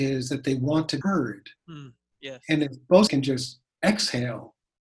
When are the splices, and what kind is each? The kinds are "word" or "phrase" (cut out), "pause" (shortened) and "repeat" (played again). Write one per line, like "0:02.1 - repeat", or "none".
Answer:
0:01.0 - word
0:03.1 - word